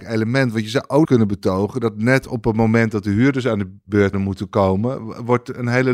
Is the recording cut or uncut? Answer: cut